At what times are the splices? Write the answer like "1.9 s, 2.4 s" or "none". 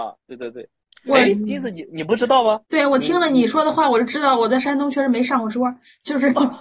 2.7 s